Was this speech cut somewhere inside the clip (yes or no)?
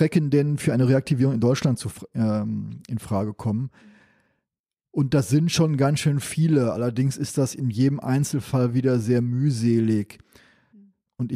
no